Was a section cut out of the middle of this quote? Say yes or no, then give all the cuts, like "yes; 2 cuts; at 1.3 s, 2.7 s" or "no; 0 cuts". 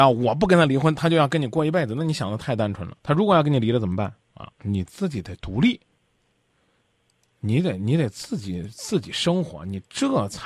yes; 2 cuts; at 3.0 s, 4.2 s